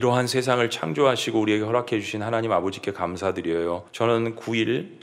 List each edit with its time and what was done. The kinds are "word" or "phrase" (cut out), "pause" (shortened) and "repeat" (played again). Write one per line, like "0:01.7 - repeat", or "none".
0:03.9 - pause